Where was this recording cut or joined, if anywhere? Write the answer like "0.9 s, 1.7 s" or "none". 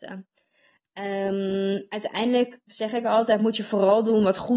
none